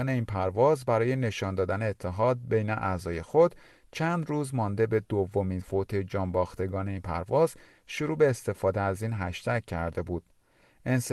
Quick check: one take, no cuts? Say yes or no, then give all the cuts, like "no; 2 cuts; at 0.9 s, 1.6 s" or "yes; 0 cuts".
no; 1 cut; at 5.6 s